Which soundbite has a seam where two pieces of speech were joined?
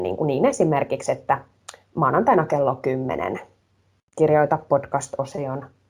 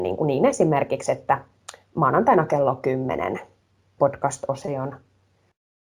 second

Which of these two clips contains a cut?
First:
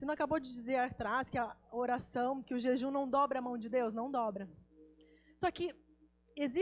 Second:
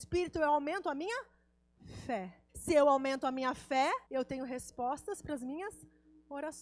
second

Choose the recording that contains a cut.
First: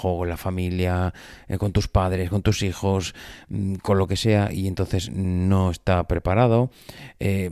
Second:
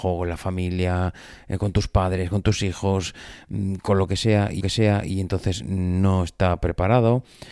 second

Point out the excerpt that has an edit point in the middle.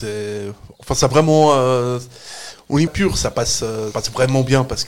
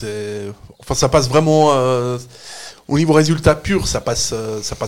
first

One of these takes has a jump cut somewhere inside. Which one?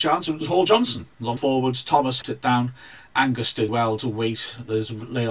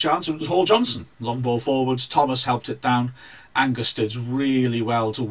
first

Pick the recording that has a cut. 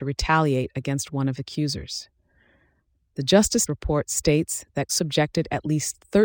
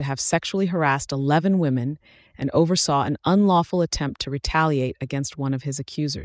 first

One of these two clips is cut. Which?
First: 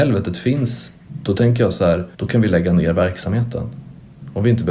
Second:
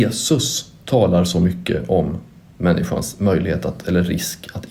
first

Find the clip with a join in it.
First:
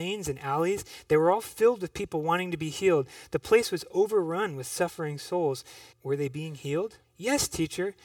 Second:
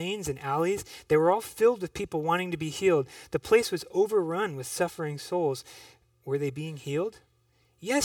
first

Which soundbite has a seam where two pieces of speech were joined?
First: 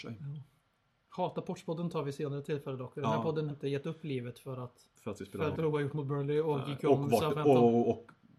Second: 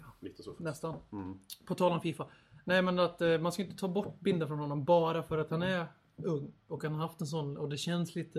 first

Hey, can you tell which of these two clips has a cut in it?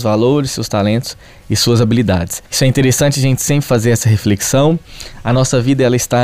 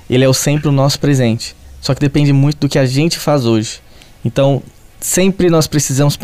first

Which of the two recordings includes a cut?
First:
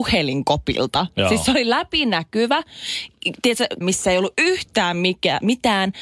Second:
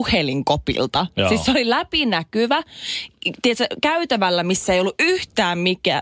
first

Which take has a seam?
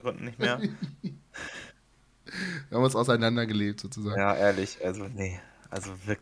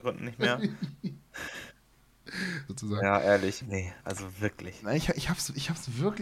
second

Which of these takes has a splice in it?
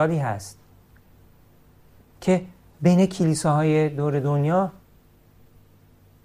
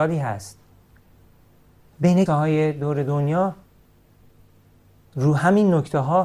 second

